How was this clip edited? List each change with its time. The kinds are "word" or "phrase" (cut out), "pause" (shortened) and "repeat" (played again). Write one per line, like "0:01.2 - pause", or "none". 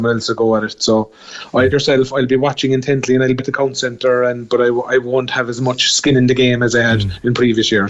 0:01.7 - word
0:03.4 - word